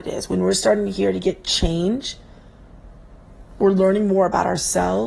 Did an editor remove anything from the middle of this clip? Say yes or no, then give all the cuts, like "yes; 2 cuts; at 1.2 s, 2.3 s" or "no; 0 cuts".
no; 0 cuts